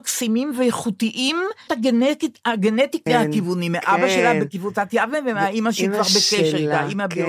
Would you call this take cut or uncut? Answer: cut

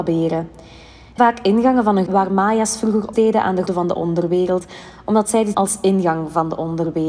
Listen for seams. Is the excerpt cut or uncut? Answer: cut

